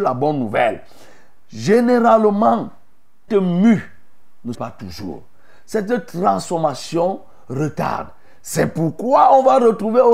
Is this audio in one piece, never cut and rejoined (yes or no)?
no